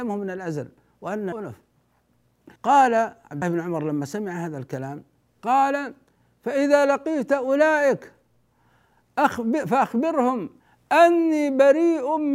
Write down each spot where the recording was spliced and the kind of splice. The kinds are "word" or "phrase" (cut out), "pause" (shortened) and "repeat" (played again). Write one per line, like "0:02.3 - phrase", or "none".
0:01.3 - word
0:02.6 - pause
0:03.4 - word